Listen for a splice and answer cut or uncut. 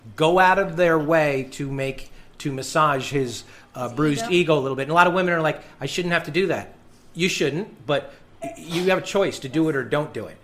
uncut